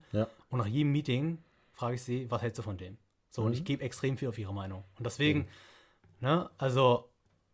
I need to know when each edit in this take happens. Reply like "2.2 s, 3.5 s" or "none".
none